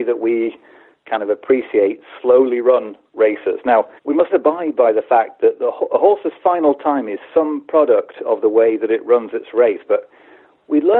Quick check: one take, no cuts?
no; 2 cuts; at 4.0 s, 4.3 s

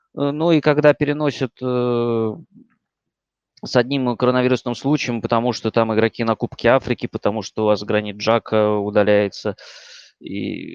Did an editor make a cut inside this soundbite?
no; 0 cuts

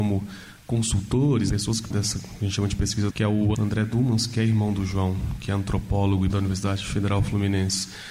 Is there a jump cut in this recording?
yes; 5 cuts; at 1.5 s, 1.9 s, 3.1 s, 3.5 s, 6.3 s

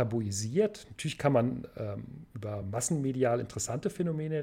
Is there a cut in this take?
no; 0 cuts

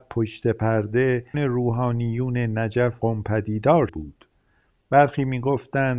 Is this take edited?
yes; 3 cuts; at 1.3 s, 3.0 s, 3.9 s

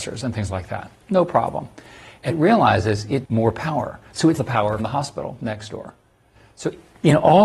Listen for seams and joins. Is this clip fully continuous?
no; 4 cuts; at 2.3 s, 3.2 s, 4.4 s, 4.8 s

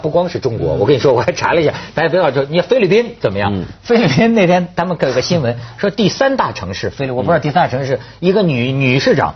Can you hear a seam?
no; 0 cuts

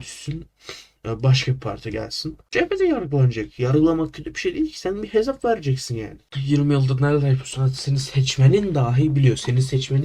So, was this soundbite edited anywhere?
no; 0 cuts

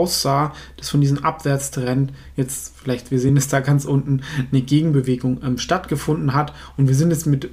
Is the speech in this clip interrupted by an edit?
no; 0 cuts

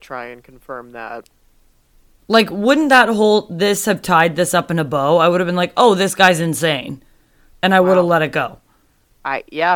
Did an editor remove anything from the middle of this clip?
no; 0 cuts

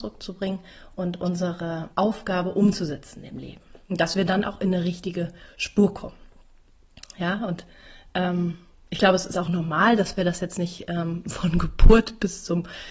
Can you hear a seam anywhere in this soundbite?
yes; 1 cut; at 1.9 s

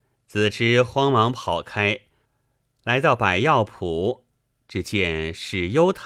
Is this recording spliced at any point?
no; 0 cuts

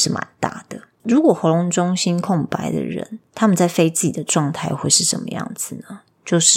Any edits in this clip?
no; 0 cuts

